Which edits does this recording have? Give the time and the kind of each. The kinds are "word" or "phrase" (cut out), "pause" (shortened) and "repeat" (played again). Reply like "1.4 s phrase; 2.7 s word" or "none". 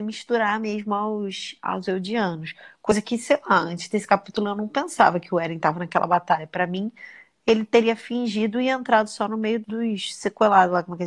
9.6 s word